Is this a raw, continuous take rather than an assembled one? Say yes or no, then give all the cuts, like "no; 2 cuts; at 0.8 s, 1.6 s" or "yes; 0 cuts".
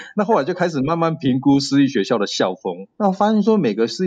no; 1 cut; at 2.9 s